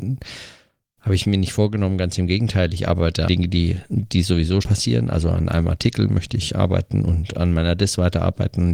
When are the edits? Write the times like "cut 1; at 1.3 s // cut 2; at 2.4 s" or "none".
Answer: cut 1; at 3.3 s // cut 2; at 4.6 s